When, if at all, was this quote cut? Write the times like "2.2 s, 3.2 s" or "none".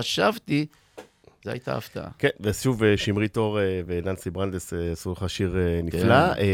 none